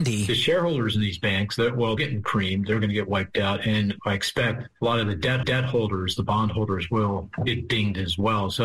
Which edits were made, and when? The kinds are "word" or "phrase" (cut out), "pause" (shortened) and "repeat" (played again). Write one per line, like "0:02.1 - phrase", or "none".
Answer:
0:02.0 - word
0:05.4 - repeat